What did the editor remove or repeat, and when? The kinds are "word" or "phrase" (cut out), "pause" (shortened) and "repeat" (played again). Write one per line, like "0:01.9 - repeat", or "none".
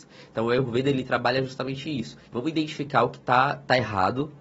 0:02.2 - pause